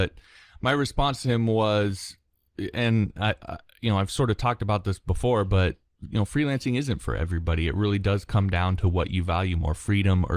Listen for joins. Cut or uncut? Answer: uncut